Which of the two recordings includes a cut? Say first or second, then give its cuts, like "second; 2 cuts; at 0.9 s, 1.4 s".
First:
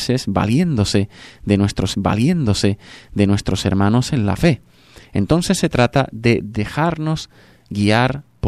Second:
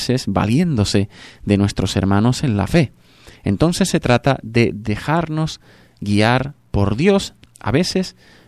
first; 1 cut; at 1.9 s